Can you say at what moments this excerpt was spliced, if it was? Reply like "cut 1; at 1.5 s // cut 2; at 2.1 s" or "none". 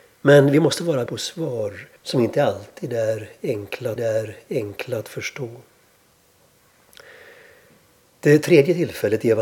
cut 1; at 1.1 s // cut 2; at 2.0 s // cut 3; at 4.0 s